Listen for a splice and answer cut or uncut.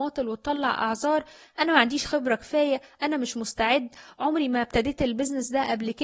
uncut